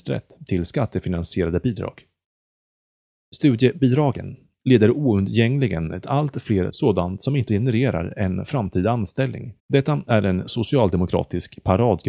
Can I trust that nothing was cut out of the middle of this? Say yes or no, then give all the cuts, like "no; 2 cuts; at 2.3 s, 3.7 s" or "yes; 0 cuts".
no; 4 cuts; at 6.0 s, 6.7 s, 7.5 s, 9.6 s